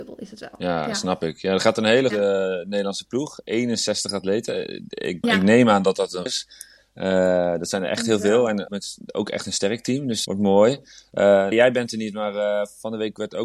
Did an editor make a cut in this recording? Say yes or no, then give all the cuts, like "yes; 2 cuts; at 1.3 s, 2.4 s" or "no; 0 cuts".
yes; 6 cuts; at 2.1 s, 5.2 s, 6.3 s, 8.7 s, 10.2 s, 11.5 s